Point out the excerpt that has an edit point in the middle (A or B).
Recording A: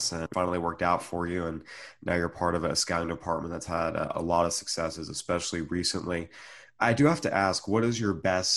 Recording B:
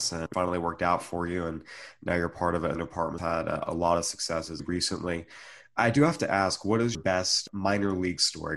B